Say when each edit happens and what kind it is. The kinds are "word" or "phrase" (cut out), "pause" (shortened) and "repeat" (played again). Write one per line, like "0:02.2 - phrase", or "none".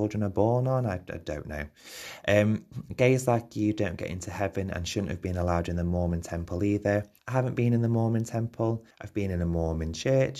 0:07.2 - pause
0:08.9 - pause

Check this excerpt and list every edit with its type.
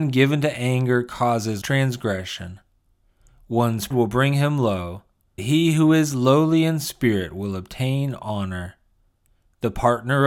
0:01.6 - word
0:03.9 - word
0:05.4 - word

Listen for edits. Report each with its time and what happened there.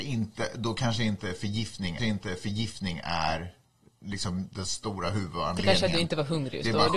0:02.0 - repeat

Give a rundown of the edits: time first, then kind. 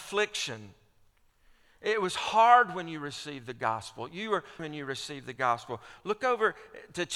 0:04.6 - word

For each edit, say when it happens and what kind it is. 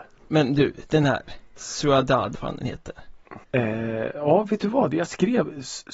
0:02.3 - phrase
0:03.4 - pause

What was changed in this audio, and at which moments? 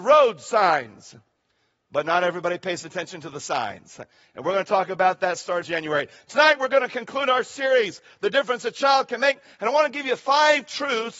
0:05.6 - word

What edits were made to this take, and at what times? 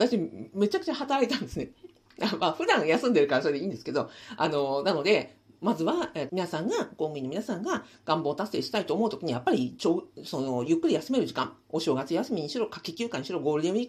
0:06.3 - word

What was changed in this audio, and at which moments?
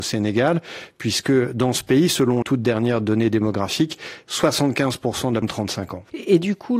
0:02.4 - word
0:05.4 - phrase

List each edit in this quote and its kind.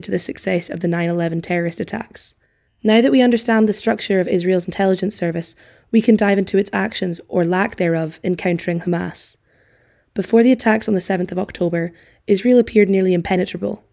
0:02.7 - pause

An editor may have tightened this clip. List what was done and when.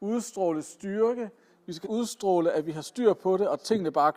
0:01.8 - word

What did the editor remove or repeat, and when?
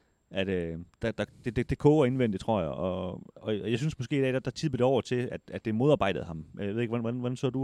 none

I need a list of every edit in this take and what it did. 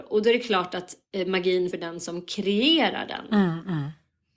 0:01.7 - phrase

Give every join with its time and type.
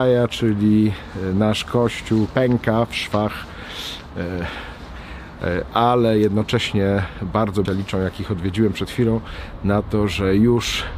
0:02.3 - word
0:07.7 - word

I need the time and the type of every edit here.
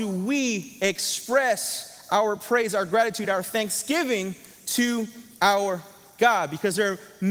none

